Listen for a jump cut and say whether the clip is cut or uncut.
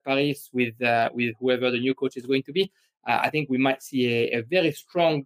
uncut